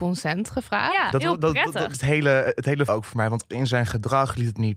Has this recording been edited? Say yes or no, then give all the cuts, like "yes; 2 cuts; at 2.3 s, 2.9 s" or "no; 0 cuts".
yes; 4 cuts; at 1.1 s, 1.9 s, 2.9 s, 3.5 s